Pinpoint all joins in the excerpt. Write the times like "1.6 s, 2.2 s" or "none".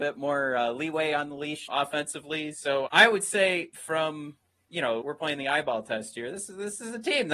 1.7 s, 2.9 s, 4.7 s, 5.0 s